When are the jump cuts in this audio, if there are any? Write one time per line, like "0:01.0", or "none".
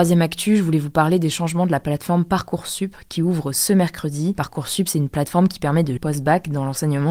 0:06.0